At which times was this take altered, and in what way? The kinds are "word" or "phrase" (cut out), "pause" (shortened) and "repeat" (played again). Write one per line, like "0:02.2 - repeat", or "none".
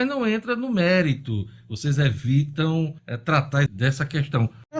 0:03.0 - pause
0:03.7 - word

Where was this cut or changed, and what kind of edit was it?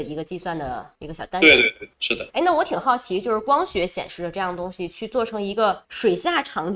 0:00.9 - pause
0:01.9 - pause
0:02.3 - pause
0:05.8 - pause

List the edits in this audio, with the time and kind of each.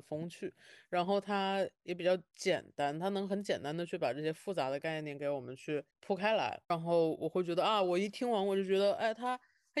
0:05.9 - pause
0:06.6 - pause

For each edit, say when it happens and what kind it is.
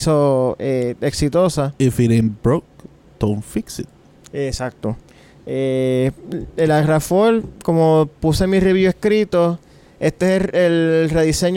none

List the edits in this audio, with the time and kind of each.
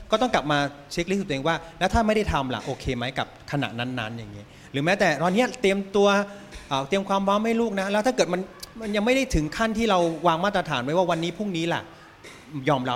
0:08.7 - pause

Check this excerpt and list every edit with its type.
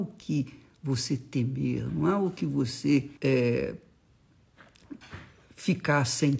0:03.2 - pause

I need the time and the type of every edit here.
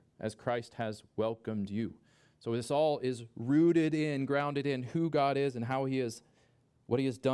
none

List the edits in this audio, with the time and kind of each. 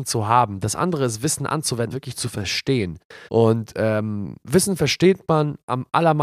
0:01.9 - phrase
0:03.3 - pause

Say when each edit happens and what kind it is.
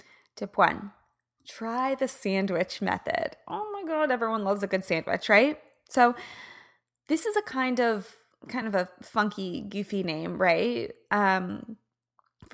none

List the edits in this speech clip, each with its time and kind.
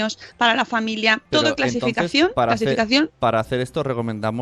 0:01.3 - pause

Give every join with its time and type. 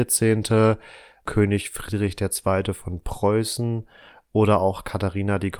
none

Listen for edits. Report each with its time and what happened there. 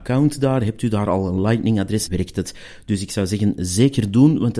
0:02.1 - word

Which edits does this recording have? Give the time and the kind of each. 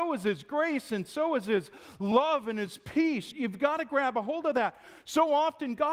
none

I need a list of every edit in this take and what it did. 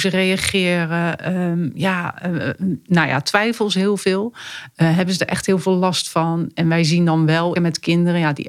0:07.6 - phrase

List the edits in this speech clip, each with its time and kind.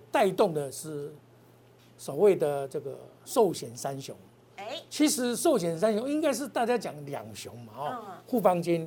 none

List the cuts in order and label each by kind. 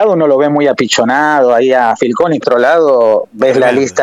0:02.4 - phrase

